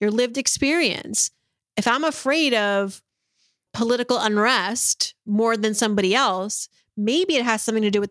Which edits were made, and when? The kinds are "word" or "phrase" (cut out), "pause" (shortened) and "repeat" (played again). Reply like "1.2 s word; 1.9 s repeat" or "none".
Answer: none